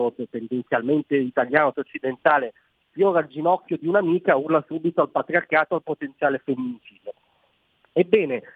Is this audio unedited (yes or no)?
no